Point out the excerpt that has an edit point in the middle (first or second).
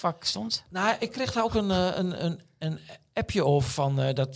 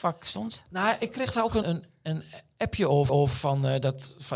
second